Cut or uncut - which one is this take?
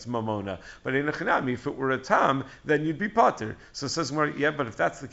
uncut